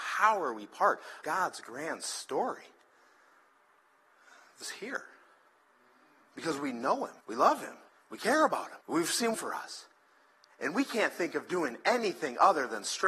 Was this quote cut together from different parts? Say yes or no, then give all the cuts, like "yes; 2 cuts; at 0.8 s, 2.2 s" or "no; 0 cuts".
yes; 6 cuts; at 1.2 s, 4.6 s, 7.2 s, 7.9 s, 8.8 s, 9.3 s